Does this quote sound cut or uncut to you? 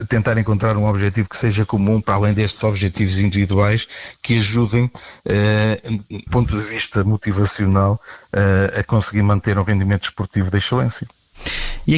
cut